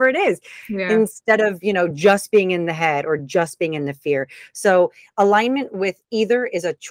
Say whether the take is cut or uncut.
uncut